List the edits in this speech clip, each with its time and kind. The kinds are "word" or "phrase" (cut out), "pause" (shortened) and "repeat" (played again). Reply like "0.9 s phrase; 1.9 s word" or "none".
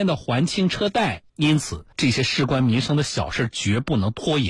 1.3 s pause; 1.9 s pause